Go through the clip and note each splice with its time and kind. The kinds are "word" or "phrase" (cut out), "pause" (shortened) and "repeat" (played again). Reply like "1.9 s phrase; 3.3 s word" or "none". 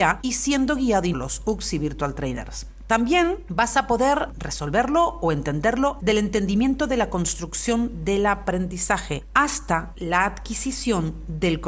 1.1 s phrase; 6.0 s phrase